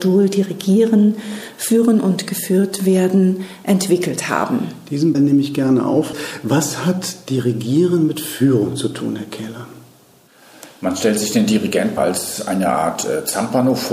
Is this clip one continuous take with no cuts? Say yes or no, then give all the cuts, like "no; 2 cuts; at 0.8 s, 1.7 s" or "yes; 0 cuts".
no; 2 cuts; at 5.1 s, 12.0 s